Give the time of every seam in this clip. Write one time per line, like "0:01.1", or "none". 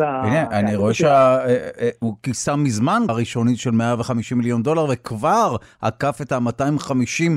0:03.1

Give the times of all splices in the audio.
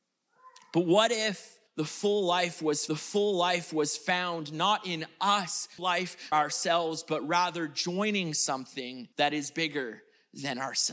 0:01.7
0:02.9
0:05.8
0:06.3
0:09.1

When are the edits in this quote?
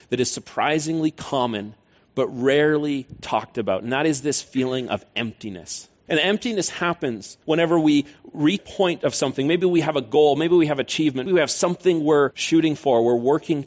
0:08.6
0:11.3

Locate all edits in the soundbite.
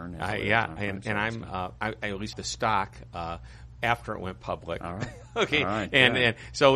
0:02.3

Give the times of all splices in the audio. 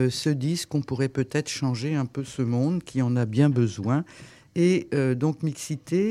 none

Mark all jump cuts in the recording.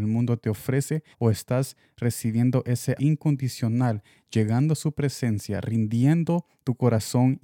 0:01.1
0:03.0

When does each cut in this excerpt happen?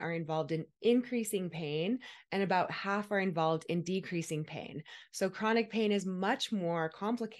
none

